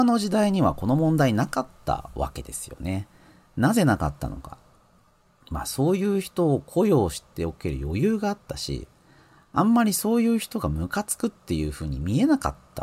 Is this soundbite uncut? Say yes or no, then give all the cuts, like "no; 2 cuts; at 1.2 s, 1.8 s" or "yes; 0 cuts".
yes; 0 cuts